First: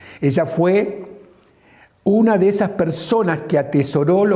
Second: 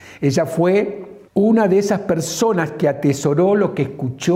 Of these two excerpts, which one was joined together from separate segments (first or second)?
second